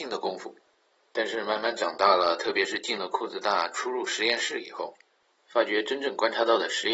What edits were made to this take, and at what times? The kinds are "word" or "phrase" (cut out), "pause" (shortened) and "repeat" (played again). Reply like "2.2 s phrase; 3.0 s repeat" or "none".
none